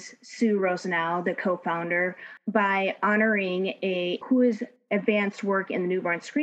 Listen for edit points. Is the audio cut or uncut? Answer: cut